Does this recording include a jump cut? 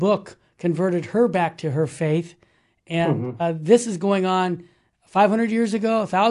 no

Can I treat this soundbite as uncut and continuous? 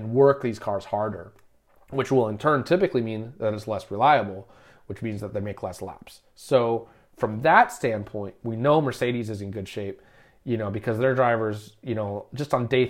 yes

